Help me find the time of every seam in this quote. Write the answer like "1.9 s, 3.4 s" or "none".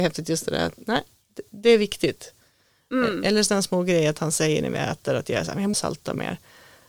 5.7 s